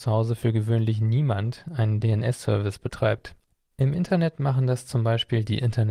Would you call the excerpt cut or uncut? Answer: uncut